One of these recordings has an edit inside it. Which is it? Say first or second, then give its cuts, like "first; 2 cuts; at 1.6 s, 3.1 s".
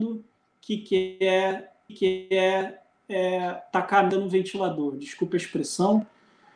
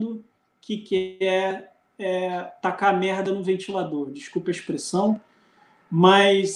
first; 2 cuts; at 1.9 s, 4.1 s